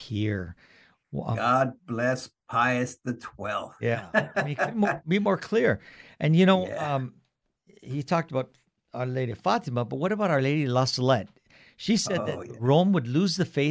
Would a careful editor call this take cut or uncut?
uncut